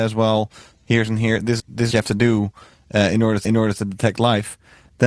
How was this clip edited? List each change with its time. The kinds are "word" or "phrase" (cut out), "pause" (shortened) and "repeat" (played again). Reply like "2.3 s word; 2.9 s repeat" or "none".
1.6 s word; 1.9 s phrase; 3.4 s repeat